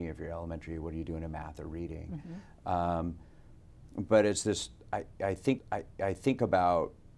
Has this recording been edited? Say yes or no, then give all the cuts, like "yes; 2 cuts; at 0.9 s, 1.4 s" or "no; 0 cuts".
yes; 1 cut; at 5.6 s